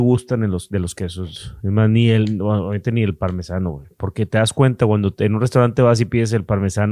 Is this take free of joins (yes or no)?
yes